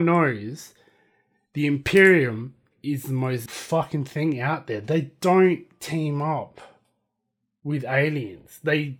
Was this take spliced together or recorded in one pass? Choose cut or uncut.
cut